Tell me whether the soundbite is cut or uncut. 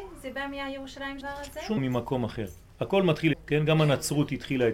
cut